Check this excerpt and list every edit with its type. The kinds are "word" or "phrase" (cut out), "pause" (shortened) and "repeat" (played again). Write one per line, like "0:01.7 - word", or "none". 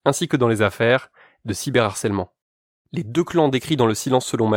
none